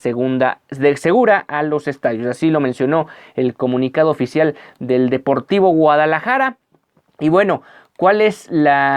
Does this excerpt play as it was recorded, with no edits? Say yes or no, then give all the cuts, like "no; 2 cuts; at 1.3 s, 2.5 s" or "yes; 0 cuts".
yes; 0 cuts